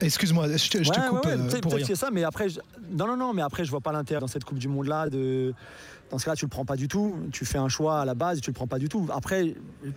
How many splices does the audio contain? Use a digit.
1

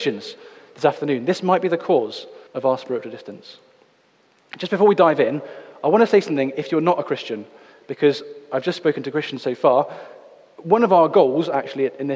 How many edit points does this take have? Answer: 1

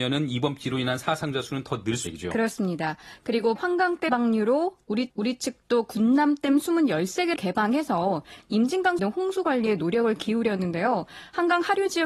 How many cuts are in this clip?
6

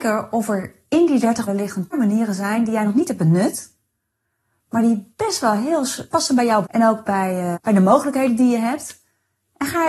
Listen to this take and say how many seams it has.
5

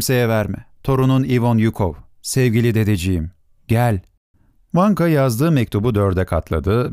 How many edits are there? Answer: 1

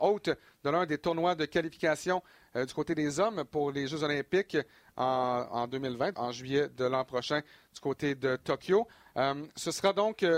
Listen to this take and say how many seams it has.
1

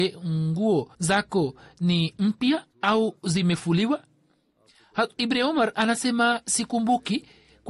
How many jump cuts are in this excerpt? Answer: 2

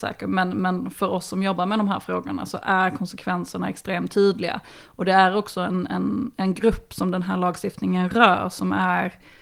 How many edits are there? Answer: 0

